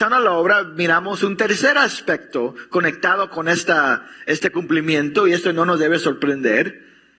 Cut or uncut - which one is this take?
uncut